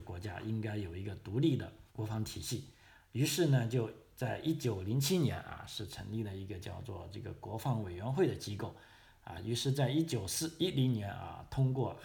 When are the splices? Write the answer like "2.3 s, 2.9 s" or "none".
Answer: 1.9 s